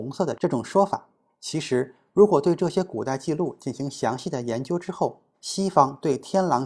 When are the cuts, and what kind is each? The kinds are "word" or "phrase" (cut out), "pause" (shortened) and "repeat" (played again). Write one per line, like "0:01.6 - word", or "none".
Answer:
0:05.3 - phrase